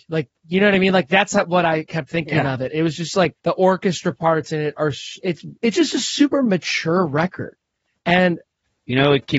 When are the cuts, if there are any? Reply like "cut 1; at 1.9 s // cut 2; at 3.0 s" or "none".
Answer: cut 1; at 3.4 s